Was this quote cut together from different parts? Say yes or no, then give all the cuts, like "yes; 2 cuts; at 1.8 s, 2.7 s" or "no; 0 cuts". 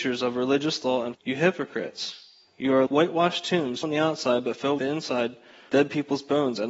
yes; 5 cuts; at 1.1 s, 2.9 s, 3.8 s, 4.8 s, 5.7 s